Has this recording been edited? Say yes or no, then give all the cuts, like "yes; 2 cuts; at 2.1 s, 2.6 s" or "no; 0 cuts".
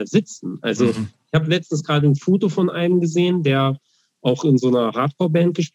no; 0 cuts